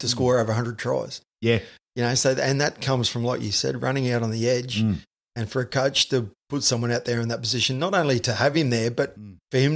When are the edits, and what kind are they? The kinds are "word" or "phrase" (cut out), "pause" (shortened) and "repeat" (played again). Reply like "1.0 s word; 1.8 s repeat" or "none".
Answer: none